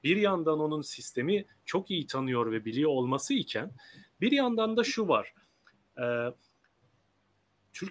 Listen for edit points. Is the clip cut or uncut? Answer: uncut